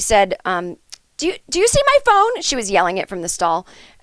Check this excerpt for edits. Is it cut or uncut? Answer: uncut